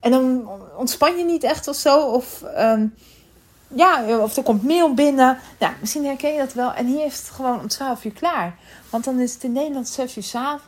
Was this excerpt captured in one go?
yes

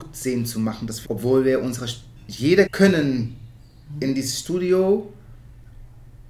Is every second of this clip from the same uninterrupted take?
no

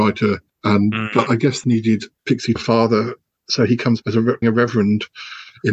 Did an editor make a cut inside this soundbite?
yes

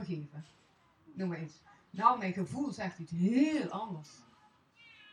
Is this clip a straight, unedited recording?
yes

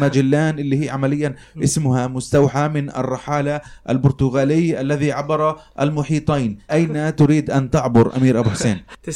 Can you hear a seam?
yes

